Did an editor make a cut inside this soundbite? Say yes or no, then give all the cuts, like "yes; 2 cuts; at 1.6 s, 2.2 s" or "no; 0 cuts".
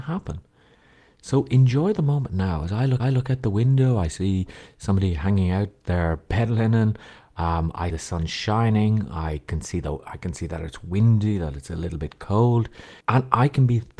yes; 3 cuts; at 3.0 s, 7.9 s, 13.0 s